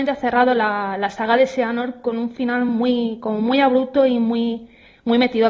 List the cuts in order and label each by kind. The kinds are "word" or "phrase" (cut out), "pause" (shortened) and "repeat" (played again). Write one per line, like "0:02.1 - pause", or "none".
none